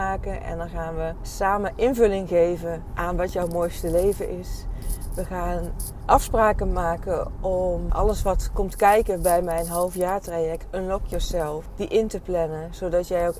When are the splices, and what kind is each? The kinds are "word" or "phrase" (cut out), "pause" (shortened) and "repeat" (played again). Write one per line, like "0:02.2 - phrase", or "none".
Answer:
none